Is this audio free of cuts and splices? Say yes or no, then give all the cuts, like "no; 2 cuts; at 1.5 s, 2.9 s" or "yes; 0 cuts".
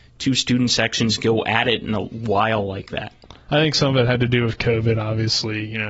yes; 0 cuts